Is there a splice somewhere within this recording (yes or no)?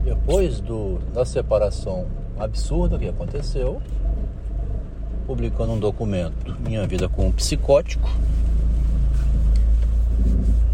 no